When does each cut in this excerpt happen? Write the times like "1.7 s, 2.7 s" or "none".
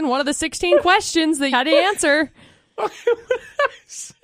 1.5 s